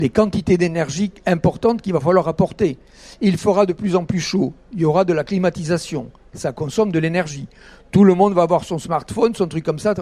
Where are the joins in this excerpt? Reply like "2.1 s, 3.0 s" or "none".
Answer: none